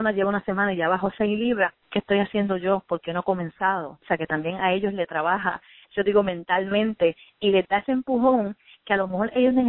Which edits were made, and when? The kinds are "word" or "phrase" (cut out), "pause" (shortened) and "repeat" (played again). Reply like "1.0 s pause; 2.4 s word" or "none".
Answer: 1.8 s pause